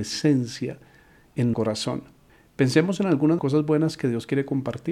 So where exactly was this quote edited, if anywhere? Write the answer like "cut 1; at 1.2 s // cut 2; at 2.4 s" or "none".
cut 1; at 1.5 s // cut 2; at 3.4 s